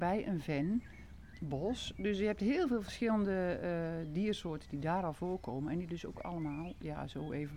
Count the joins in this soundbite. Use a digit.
0